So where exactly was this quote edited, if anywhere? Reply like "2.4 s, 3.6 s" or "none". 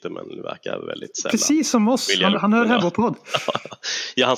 2.3 s, 2.8 s